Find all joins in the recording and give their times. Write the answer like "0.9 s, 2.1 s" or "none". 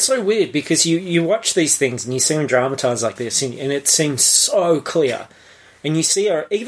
none